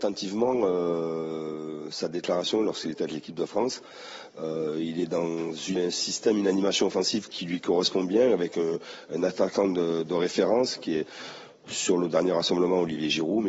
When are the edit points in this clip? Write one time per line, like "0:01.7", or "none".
0:05.8